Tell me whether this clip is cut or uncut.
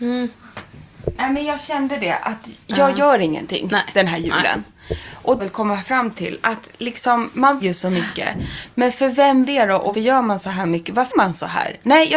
cut